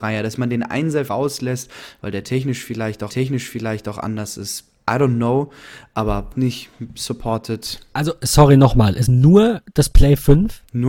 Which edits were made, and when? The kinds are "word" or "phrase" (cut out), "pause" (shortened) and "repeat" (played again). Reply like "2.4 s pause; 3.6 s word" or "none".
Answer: 1.1 s word; 3.1 s repeat; 6.3 s phrase; 9.1 s word